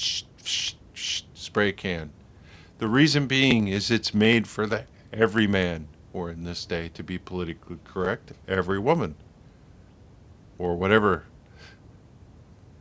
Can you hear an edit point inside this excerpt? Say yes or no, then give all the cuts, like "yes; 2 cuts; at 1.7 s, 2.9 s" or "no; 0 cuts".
no; 0 cuts